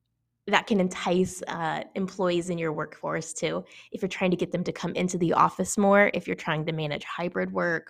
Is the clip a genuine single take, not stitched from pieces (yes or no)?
yes